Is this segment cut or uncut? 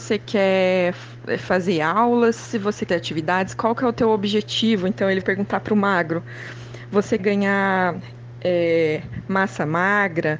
cut